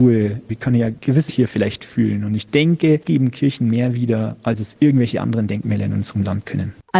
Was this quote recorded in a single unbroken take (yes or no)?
no